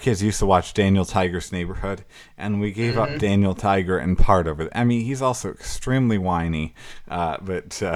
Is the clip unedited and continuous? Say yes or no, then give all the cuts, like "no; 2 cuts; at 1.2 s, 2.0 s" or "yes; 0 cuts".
yes; 0 cuts